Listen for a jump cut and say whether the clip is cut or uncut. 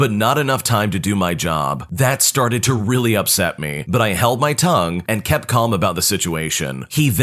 uncut